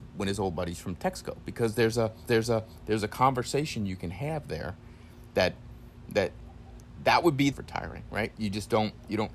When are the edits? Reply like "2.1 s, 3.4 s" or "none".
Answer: 2.3 s, 7.5 s